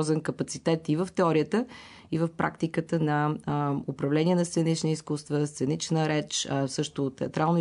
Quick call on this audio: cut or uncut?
uncut